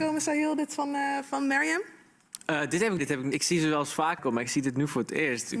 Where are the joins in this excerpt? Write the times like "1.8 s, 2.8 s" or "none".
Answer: 3.0 s, 3.3 s, 4.2 s

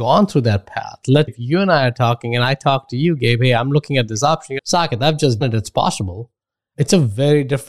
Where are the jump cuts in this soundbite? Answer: 1.3 s, 4.6 s, 5.4 s

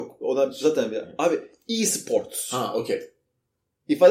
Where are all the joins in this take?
none

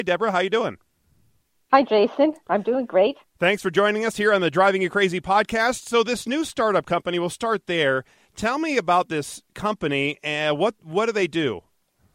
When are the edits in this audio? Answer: none

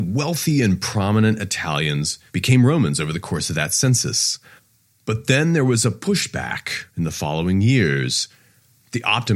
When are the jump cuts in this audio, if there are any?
2.3 s, 4.6 s, 6.9 s

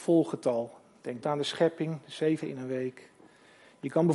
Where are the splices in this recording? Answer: 1.2 s, 2.4 s

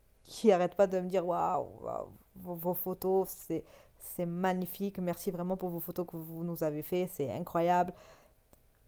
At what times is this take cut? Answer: none

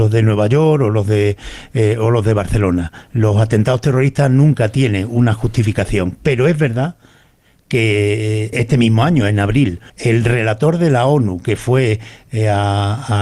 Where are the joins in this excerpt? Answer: 8.5 s, 9.9 s

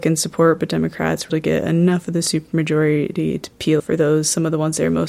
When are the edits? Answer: 1.3 s, 3.8 s

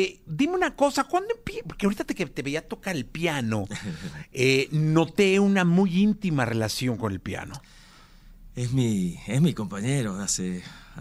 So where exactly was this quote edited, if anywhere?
none

